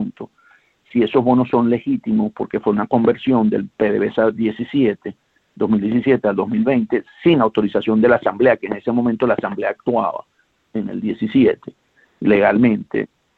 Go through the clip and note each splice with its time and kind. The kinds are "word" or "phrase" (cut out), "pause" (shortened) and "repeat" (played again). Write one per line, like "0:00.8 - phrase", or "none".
none